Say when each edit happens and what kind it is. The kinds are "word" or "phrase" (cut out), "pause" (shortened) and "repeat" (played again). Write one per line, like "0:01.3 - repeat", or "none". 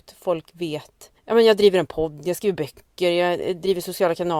none